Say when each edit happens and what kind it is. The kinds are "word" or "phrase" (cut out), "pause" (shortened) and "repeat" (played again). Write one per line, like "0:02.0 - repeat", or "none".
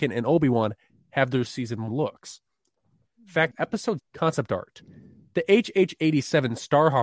0:01.9 - word
0:03.5 - word
0:04.0 - word